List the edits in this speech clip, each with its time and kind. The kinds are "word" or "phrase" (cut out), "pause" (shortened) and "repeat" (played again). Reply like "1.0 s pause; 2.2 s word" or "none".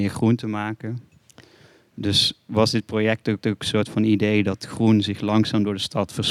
3.4 s repeat